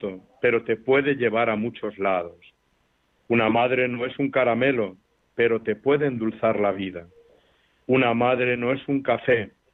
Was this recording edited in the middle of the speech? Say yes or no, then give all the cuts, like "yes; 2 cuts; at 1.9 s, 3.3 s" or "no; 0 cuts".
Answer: no; 0 cuts